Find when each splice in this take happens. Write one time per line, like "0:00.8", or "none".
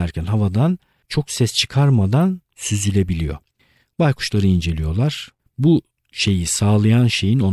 none